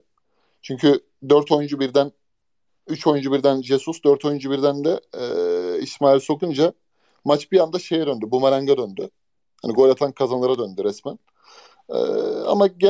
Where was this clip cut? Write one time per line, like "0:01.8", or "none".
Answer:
none